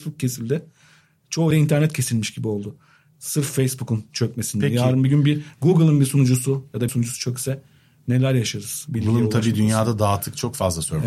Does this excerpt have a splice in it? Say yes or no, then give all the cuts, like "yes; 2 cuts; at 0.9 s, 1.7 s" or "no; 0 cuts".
yes; 2 cuts; at 1.5 s, 6.9 s